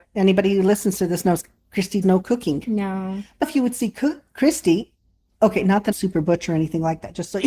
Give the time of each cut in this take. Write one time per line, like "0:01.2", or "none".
0:02.0
0:03.4
0:05.9